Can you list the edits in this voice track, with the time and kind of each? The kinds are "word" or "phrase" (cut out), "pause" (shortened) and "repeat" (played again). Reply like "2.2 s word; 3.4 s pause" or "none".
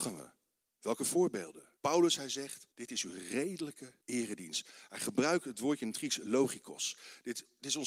1.8 s pause; 2.7 s pause; 4.0 s pause